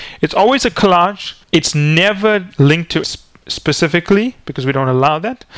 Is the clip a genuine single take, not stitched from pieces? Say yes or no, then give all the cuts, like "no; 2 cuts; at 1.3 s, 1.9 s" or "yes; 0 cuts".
no; 2 cuts; at 1.4 s, 3.0 s